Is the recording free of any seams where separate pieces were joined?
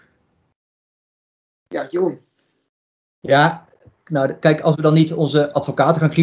yes; 0 cuts

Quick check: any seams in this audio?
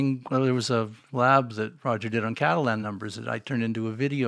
no; 0 cuts

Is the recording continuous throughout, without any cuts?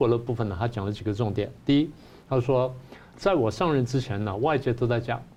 yes; 0 cuts

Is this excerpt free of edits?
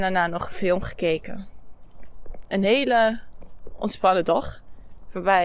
yes; 0 cuts

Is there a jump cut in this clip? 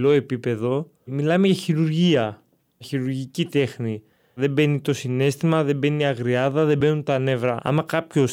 no; 0 cuts

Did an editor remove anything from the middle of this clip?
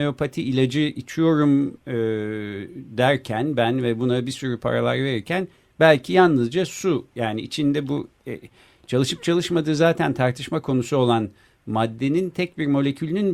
no; 0 cuts

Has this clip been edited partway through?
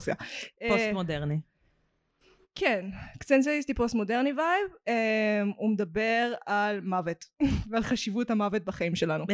no; 0 cuts

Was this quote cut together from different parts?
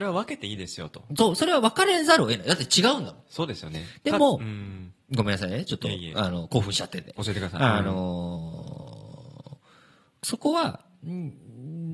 no; 0 cuts

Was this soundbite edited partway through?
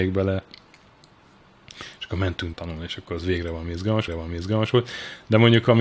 yes; 2 cuts; at 2.5 s, 4.1 s

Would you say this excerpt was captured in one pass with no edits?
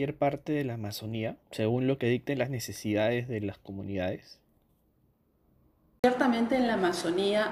no; 1 cut; at 1.4 s

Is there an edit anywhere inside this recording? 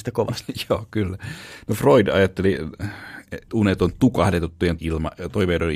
yes; 2 cuts; at 3.5 s, 4.8 s

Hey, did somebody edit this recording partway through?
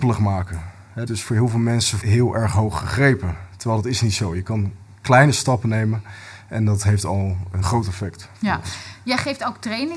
yes; 3 cuts; at 1.1 s, 2.0 s, 7.6 s

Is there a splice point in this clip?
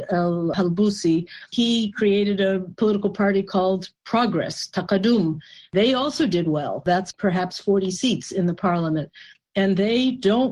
no; 0 cuts

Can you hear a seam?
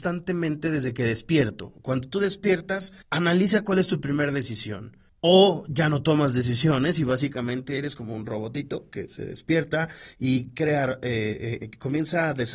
yes; 2 cuts; at 3.0 s, 5.1 s

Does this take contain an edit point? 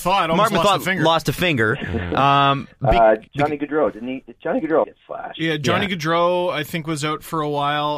yes; 2 cuts; at 3.3 s, 4.8 s

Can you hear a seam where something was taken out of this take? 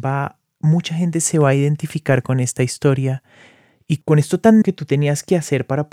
yes; 1 cut; at 4.6 s

